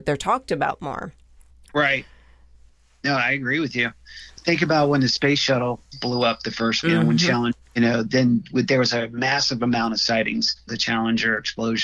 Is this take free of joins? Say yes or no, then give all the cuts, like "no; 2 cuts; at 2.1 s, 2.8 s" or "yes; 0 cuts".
no; 4 cuts; at 1.5 s, 6.8 s, 7.6 s, 10.7 s